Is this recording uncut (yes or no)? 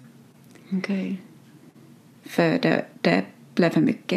yes